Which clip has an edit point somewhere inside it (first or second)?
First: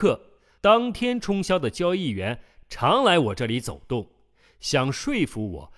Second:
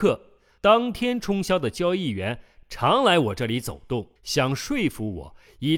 second